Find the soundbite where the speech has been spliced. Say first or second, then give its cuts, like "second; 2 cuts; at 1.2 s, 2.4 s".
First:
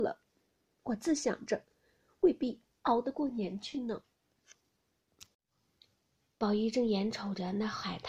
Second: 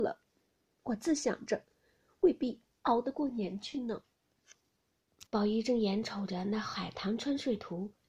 second; 1 cut; at 5.3 s